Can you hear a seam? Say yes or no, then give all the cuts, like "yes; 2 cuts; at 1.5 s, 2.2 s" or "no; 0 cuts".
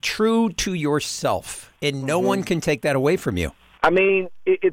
yes; 2 cuts; at 1.8 s, 3.7 s